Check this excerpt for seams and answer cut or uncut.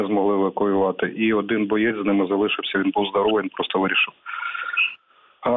uncut